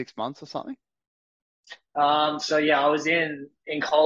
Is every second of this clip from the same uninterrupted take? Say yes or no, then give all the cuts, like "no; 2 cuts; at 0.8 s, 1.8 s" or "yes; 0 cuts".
yes; 0 cuts